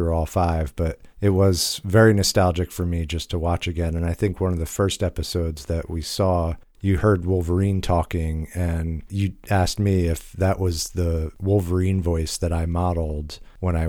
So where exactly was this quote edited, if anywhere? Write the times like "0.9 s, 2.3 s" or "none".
1.1 s, 6.7 s